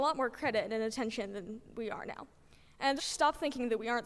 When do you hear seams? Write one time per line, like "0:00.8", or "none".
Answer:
0:03.0